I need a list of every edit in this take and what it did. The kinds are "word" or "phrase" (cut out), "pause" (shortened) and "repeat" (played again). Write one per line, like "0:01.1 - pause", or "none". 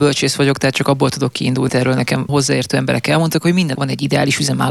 0:01.7 - word
0:02.3 - word
0:03.7 - word